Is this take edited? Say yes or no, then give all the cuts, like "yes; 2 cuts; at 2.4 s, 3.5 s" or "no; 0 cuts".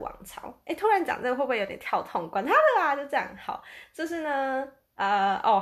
no; 0 cuts